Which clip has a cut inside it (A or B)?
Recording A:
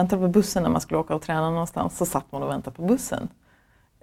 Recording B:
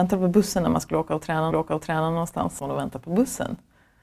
B